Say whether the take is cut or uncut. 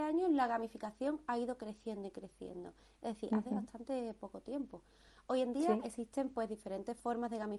uncut